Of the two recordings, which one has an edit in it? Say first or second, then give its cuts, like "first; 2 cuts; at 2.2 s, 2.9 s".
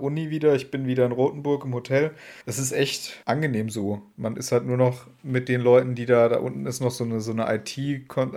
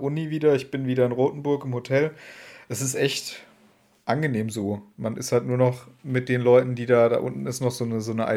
first; 2 cuts; at 2.4 s, 3.2 s